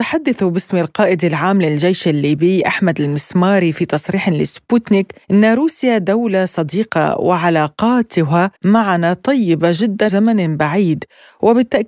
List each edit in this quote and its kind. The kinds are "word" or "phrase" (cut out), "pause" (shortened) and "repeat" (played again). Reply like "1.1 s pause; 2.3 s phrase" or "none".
5.2 s pause; 8.6 s pause; 10.1 s word